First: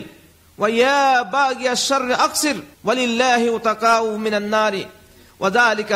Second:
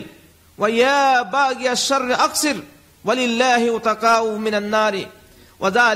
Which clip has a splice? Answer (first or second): first